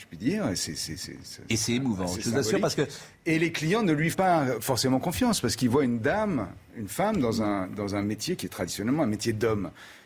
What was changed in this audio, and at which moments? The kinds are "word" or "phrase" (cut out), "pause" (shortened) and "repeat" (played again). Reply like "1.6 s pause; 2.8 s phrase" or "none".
1.0 s word; 4.1 s word